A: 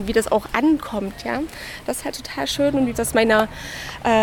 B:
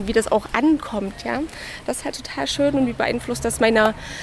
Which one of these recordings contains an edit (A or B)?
A